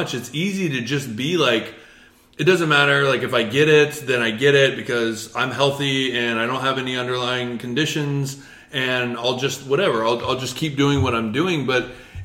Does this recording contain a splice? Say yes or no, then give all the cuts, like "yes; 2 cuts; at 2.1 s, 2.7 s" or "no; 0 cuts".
no; 0 cuts